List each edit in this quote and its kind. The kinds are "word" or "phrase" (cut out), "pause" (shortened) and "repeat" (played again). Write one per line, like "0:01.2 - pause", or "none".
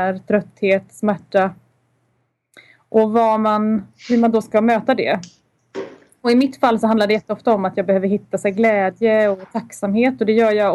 none